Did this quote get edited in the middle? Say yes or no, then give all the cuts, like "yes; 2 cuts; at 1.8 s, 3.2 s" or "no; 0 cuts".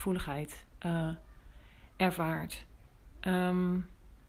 yes; 1 cut; at 3.1 s